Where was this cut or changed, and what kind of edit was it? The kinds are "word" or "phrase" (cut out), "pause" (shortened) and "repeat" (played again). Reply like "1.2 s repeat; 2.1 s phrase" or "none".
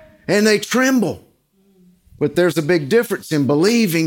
none

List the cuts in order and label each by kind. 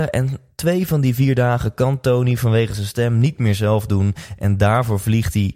none

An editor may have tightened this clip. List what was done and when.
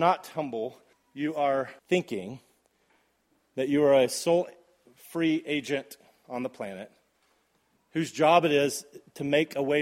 0.9 s pause; 1.8 s pause

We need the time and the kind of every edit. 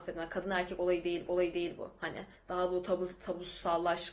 1.3 s repeat; 2.4 s pause

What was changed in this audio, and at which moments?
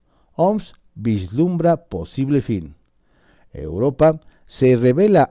none

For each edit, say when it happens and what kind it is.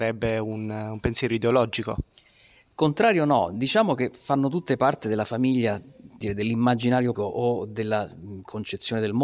6.2 s word; 7.1 s word

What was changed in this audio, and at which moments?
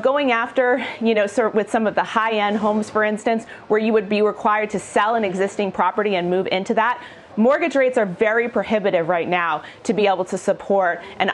none

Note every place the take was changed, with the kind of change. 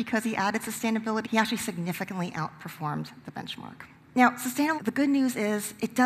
1.2 s phrase; 4.0 s pause; 4.8 s word

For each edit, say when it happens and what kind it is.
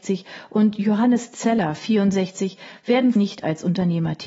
3.1 s word

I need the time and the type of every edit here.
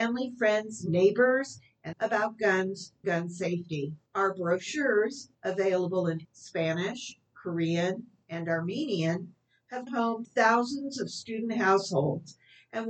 1.9 s phrase; 3.0 s word; 4.1 s pause; 5.3 s pause; 6.2 s word; 9.9 s word; 10.2 s word

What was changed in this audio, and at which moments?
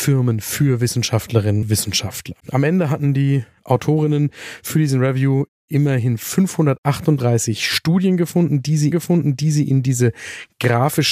1.6 s word; 2.4 s pause; 8.9 s repeat

